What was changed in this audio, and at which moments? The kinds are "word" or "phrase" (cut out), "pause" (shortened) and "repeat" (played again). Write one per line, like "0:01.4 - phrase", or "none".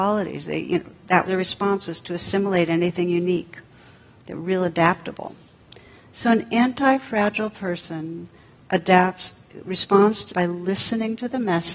0:01.2 - word
0:10.3 - word